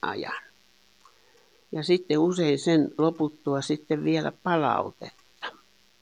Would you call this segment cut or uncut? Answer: cut